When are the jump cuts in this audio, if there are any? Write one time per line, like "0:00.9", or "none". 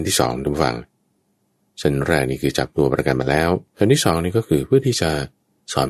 0:03.7